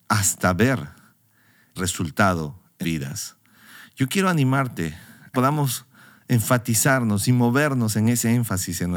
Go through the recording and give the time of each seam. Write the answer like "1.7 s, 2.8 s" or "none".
1.8 s, 2.8 s, 5.3 s

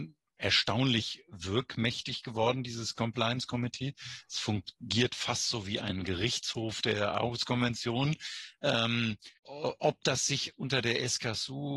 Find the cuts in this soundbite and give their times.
9.4 s

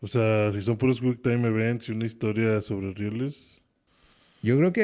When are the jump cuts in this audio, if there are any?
none

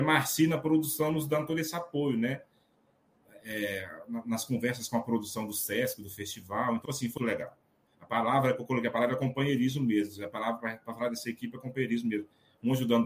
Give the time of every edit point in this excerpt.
6.8 s, 7.2 s

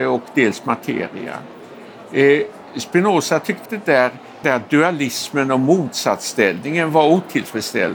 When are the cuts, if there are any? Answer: 3.7 s, 4.4 s

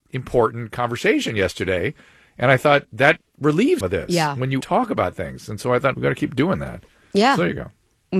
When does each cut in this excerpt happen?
3.8 s, 4.6 s, 5.9 s

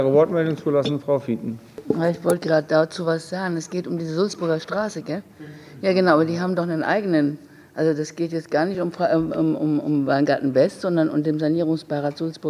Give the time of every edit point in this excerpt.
none

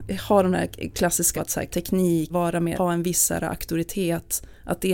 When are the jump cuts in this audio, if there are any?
1.3 s, 1.7 s, 2.3 s, 2.7 s

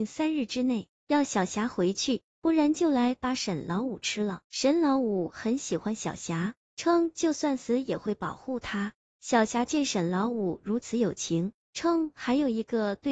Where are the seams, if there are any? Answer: 4.4 s

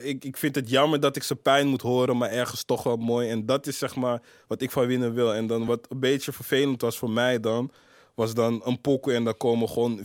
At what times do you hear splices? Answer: none

